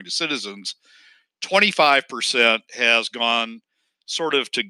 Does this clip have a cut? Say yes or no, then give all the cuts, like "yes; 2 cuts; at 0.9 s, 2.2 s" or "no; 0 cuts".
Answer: no; 0 cuts